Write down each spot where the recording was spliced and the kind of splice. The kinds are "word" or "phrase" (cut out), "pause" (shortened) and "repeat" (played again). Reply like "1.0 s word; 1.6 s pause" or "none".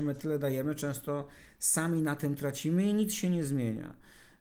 none